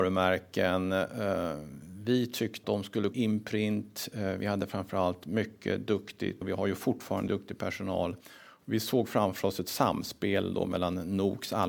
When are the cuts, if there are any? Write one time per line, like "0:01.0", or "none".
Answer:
0:02.6
0:03.1
0:06.4
0:07.3